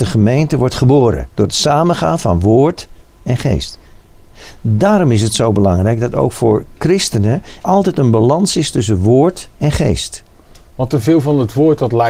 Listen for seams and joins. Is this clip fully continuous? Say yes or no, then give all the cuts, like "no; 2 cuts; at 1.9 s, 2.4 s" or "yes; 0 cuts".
no; 3 cuts; at 1.3 s, 7.6 s, 9.5 s